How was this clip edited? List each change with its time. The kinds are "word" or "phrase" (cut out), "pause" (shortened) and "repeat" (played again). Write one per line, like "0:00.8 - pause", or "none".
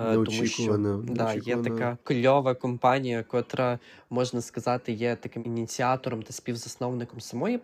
0:02.0 - pause